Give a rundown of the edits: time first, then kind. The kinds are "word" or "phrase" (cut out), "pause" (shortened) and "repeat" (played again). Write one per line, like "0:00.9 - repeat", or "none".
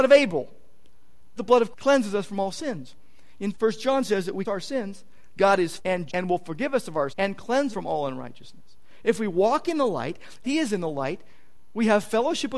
0:01.4 - word
0:01.7 - word
0:03.5 - word
0:04.4 - word
0:05.8 - word
0:06.1 - word
0:07.1 - word
0:07.7 - word
0:10.4 - word